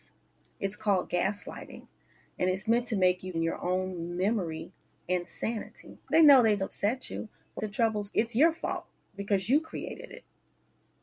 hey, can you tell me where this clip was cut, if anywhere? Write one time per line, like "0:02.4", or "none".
0:03.3
0:04.8
0:06.0
0:06.6
0:07.6
0:08.1

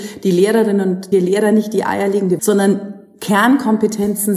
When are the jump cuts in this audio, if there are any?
0:01.1
0:02.4

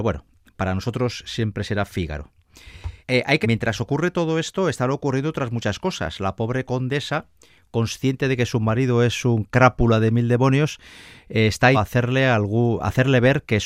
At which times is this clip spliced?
0:03.0
0:03.4
0:11.7

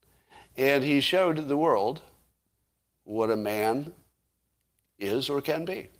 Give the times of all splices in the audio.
none

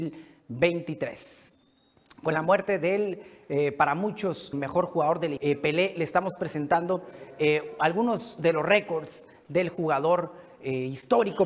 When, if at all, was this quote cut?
0:04.5
0:05.4

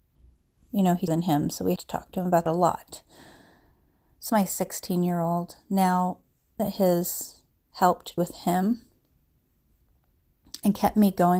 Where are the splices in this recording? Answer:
0:01.1
0:01.8
0:02.5
0:04.3
0:06.6
0:08.2

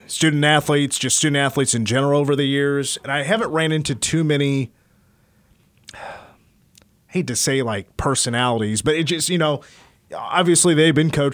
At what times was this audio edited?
none

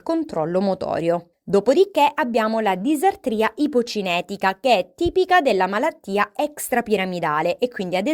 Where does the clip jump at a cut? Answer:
none

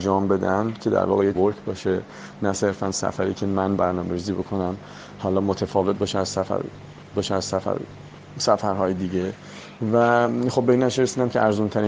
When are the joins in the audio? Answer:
0:01.3
0:03.8
0:07.1

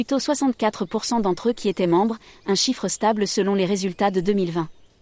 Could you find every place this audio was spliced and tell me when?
none

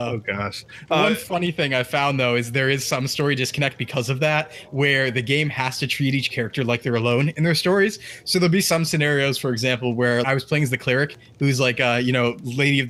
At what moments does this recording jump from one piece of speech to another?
0:10.2

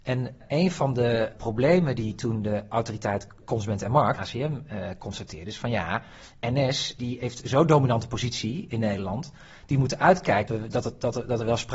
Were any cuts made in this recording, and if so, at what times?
0:01.3
0:04.2
0:07.0
0:10.5

